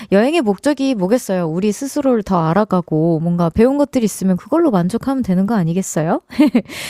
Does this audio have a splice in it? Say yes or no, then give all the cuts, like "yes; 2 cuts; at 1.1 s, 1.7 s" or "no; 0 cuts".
no; 0 cuts